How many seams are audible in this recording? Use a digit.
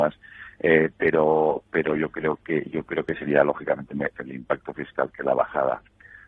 1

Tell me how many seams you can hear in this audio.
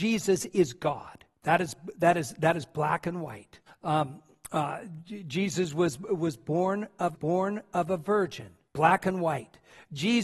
4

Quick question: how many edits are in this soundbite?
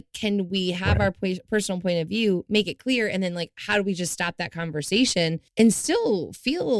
1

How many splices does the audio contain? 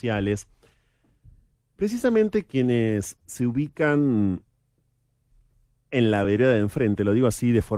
0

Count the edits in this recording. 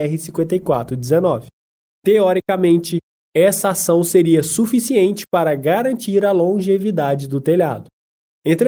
0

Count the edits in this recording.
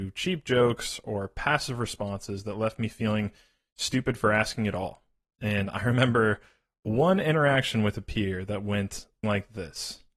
1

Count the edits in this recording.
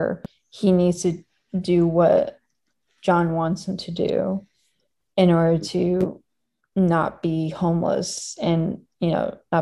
0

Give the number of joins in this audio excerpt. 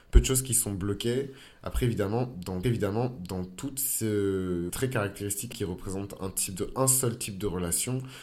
3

